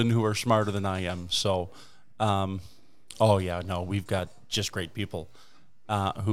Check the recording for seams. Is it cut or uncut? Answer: uncut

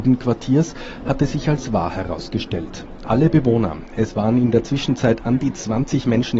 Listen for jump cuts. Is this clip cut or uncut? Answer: uncut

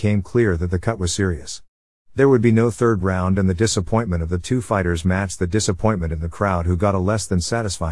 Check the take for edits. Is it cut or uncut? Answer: uncut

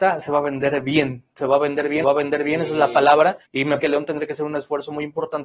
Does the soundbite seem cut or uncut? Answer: cut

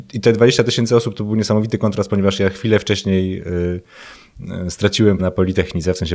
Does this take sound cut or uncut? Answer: cut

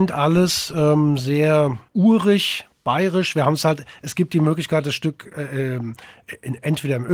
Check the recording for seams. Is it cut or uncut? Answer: cut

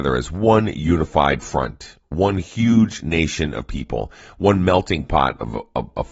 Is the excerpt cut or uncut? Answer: uncut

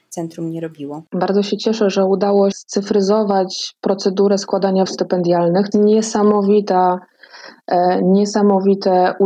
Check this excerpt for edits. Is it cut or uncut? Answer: cut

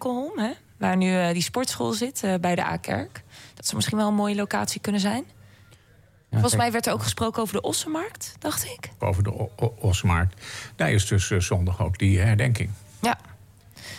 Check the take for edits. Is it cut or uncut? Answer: cut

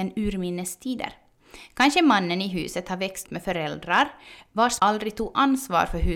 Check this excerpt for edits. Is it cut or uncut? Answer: cut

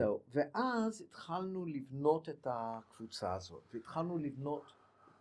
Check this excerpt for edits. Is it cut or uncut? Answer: uncut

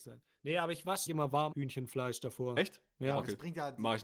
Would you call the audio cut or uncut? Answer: cut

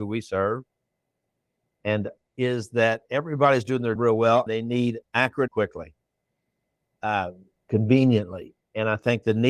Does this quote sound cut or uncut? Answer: cut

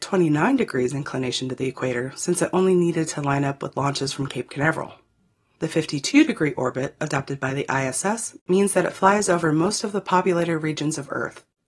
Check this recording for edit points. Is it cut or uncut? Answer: uncut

